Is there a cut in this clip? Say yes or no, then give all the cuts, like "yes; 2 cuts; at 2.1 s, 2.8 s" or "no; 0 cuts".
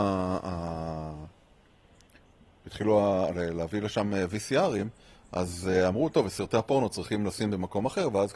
no; 0 cuts